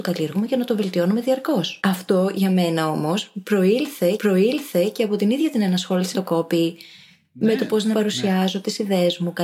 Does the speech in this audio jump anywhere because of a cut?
yes; 4 cuts; at 1.8 s, 4.2 s, 6.1 s, 7.9 s

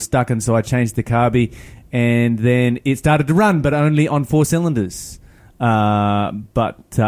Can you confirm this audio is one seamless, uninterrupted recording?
yes; 0 cuts

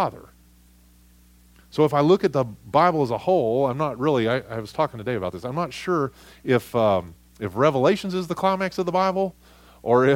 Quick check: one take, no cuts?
yes; 0 cuts

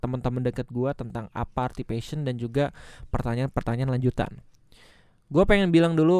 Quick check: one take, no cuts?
yes; 0 cuts

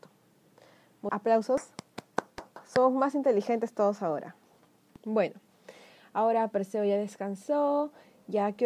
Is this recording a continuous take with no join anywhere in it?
no; 1 cut; at 1.1 s

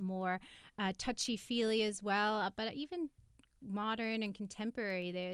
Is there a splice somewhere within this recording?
no; 0 cuts

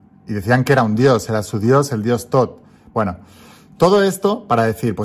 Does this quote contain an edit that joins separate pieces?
no; 0 cuts

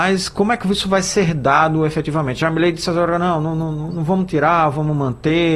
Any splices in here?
no; 0 cuts

